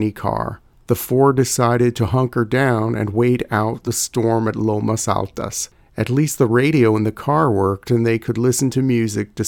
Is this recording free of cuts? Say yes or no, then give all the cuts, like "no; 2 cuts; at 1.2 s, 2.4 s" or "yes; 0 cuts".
yes; 0 cuts